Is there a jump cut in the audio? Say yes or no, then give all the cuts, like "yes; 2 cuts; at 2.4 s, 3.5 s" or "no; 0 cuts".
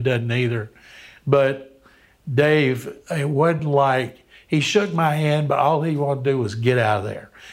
no; 0 cuts